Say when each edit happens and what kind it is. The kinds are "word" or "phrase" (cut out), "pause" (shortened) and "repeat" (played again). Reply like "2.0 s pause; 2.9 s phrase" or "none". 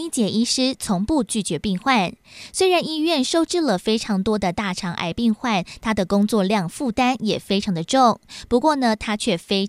none